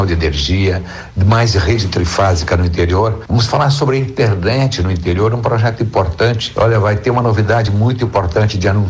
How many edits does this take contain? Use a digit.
0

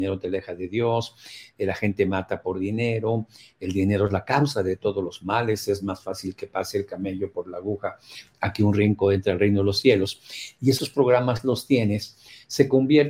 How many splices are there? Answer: 0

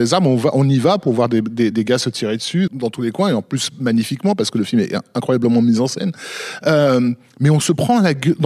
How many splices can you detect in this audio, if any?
2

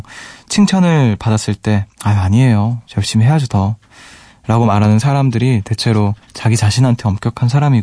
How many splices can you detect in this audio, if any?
2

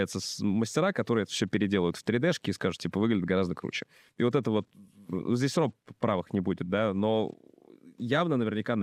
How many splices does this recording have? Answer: 0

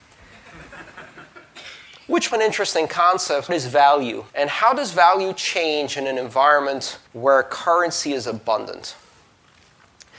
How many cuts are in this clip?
4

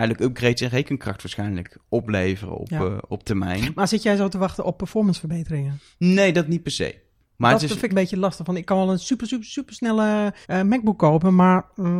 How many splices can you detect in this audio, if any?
3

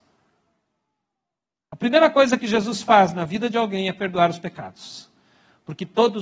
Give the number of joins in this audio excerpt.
0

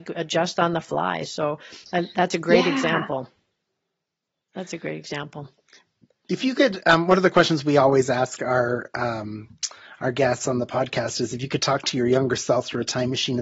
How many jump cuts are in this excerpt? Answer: 0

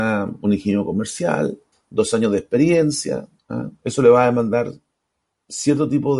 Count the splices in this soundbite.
2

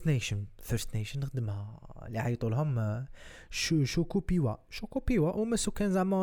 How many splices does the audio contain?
0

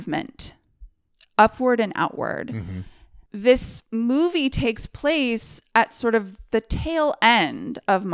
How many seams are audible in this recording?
0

